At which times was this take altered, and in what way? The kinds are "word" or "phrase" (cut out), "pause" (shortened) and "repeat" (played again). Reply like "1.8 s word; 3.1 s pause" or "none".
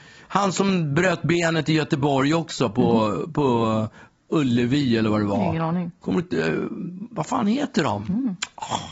none